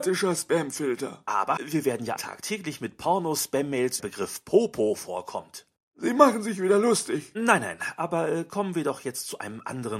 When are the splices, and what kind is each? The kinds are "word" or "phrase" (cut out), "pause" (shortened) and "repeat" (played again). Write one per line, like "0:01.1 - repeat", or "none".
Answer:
0:01.6 - word
0:02.2 - word
0:04.0 - phrase